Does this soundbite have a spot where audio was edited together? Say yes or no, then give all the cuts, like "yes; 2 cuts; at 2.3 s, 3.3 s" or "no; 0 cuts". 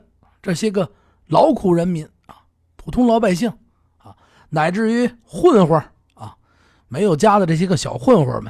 no; 0 cuts